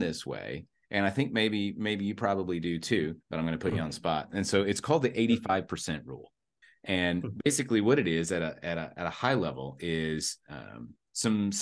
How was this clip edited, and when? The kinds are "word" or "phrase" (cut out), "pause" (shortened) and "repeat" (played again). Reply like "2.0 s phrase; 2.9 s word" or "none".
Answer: 3.2 s pause; 6.6 s pause

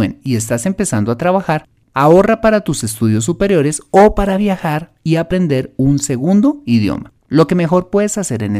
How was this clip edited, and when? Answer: 7.2 s pause

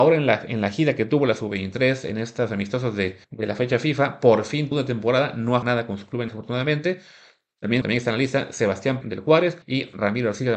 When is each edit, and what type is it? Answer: 3.2 s pause; 4.7 s phrase; 5.6 s word; 6.3 s word; 7.8 s word; 9.0 s phrase; 9.6 s pause

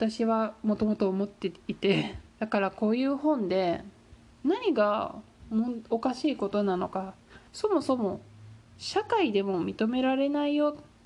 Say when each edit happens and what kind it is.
2.3 s pause; 7.5 s pause

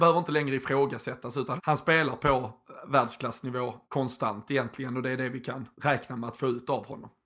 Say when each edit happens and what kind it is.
1.6 s word; 3.8 s pause; 5.7 s pause

